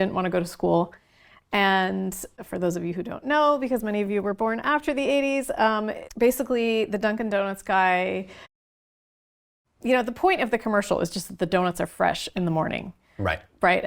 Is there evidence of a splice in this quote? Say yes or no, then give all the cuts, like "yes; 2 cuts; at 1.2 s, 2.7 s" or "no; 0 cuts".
no; 0 cuts